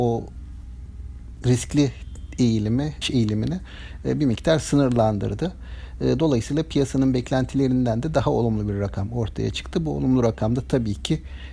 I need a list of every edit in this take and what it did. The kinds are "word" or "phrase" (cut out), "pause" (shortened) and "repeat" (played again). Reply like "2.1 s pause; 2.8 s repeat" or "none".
3.0 s word